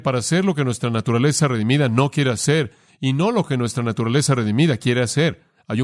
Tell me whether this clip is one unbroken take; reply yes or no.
yes